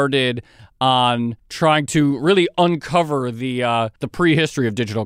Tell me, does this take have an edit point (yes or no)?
yes